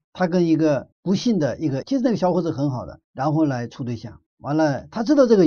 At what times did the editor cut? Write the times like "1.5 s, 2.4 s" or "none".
0.9 s, 3.0 s, 4.3 s